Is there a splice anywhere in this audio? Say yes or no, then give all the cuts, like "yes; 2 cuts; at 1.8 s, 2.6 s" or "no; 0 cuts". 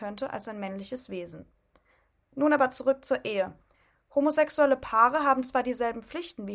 no; 0 cuts